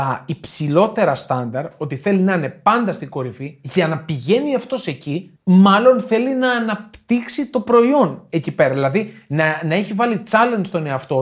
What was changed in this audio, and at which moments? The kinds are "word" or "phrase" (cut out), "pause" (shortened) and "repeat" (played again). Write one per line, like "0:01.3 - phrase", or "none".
0:05.4 - pause